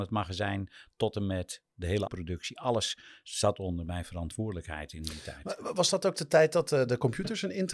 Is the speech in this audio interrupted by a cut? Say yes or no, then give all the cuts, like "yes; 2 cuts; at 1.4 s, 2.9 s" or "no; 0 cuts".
yes; 1 cut; at 2.1 s